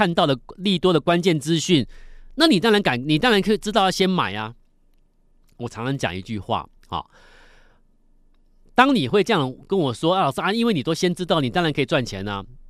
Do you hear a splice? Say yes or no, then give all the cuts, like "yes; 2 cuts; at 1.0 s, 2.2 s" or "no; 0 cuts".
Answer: no; 0 cuts